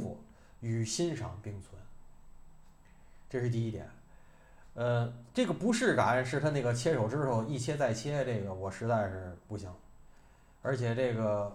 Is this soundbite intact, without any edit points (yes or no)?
yes